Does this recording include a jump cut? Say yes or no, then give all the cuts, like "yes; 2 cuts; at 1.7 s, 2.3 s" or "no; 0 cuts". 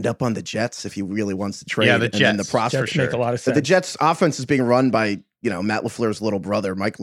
no; 0 cuts